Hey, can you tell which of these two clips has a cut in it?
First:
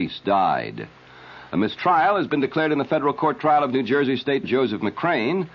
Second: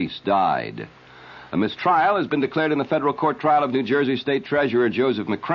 first; 1 cut; at 4.4 s

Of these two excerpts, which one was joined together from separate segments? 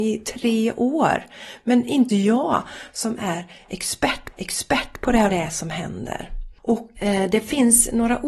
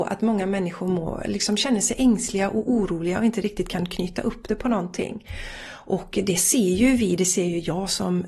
first; 4 cuts; at 2.1 s, 4.3 s, 5.3 s, 7.0 s

